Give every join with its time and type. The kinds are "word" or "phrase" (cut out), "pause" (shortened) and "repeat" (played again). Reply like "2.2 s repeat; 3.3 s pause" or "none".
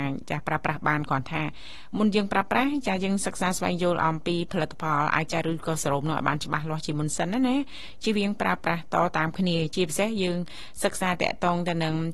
5.3 s word